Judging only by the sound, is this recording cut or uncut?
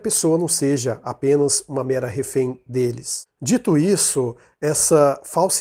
uncut